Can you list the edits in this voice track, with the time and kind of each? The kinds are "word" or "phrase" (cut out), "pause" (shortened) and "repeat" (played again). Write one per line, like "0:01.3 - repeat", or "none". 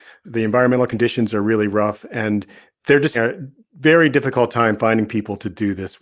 0:03.1 - word